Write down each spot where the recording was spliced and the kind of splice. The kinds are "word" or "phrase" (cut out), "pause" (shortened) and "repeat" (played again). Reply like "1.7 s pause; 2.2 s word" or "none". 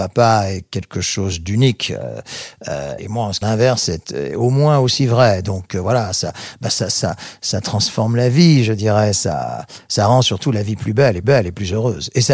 3.0 s word; 3.4 s phrase; 11.2 s repeat